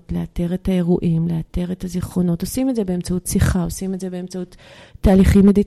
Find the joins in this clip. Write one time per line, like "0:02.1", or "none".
none